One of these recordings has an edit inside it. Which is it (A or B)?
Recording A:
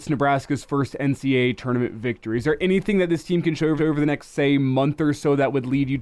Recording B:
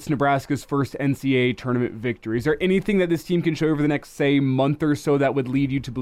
A